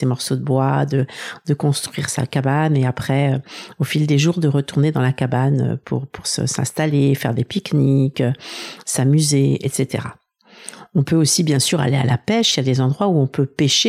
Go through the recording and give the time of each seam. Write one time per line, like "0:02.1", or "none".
none